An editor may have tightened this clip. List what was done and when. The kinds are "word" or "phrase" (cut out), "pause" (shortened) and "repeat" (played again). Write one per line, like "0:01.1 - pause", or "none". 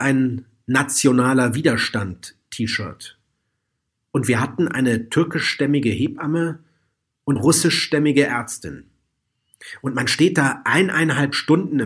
0:07.4 - word